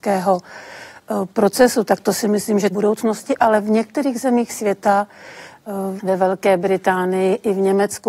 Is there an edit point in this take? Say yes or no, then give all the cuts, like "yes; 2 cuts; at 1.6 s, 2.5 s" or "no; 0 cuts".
yes; 2 cuts; at 2.7 s, 6.0 s